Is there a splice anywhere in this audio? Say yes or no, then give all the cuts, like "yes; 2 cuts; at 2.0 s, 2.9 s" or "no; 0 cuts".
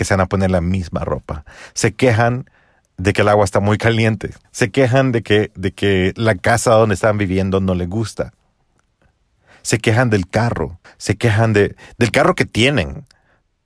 yes; 2 cuts; at 4.4 s, 10.8 s